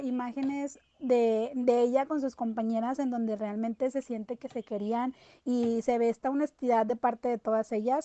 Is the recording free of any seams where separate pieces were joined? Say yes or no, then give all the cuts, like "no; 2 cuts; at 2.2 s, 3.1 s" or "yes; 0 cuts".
yes; 0 cuts